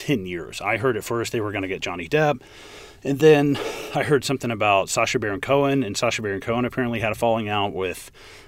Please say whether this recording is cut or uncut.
uncut